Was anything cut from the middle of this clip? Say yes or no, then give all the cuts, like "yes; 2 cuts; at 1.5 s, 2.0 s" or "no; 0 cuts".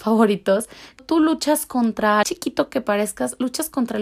yes; 2 cuts; at 1.0 s, 2.2 s